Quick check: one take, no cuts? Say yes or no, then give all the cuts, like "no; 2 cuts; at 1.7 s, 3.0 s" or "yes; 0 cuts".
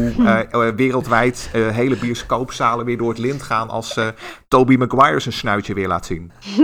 yes; 0 cuts